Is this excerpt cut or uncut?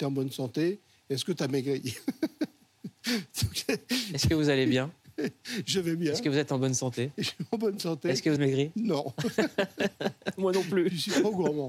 cut